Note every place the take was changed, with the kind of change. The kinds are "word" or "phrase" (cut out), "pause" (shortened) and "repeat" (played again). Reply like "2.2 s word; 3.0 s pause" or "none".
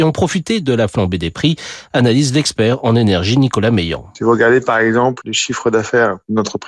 none